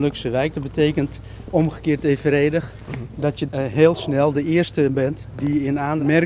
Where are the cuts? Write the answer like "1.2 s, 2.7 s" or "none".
3.5 s